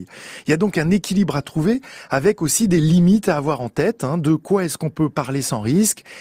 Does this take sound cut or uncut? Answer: uncut